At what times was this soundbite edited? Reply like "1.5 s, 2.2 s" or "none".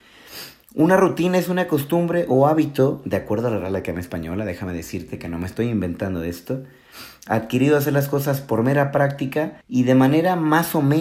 9.6 s